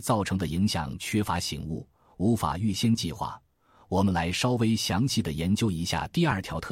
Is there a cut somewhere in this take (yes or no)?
no